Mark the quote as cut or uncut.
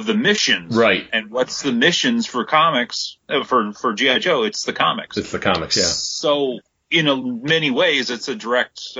uncut